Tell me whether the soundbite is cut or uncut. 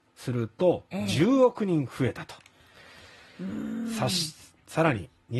uncut